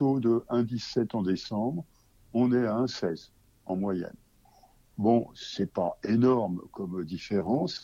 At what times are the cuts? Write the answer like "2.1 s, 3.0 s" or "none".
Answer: none